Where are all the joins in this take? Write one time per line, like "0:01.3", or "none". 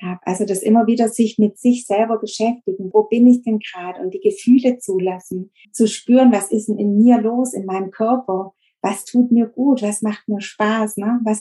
0:02.9
0:05.6